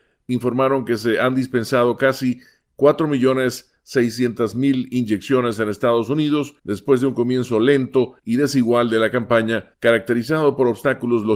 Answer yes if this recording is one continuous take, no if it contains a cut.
no